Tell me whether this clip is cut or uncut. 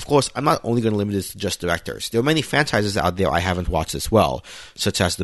uncut